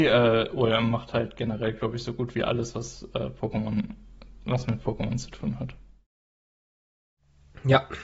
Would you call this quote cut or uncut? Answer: uncut